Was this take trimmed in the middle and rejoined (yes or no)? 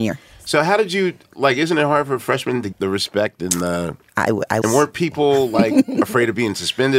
yes